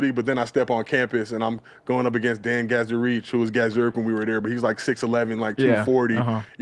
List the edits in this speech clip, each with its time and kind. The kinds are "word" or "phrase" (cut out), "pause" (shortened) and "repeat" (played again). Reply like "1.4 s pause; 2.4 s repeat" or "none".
none